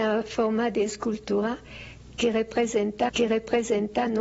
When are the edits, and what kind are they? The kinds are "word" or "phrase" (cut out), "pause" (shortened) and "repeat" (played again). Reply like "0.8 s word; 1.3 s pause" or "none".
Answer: 3.1 s repeat